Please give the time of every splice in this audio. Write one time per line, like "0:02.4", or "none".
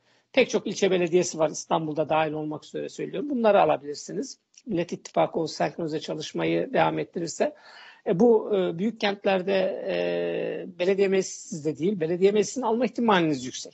none